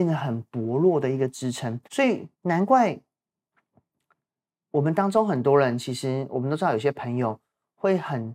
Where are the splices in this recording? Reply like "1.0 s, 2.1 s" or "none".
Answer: 1.8 s, 2.3 s